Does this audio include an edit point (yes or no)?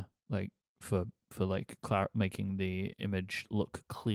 no